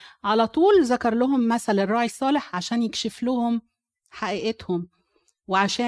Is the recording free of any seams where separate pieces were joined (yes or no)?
yes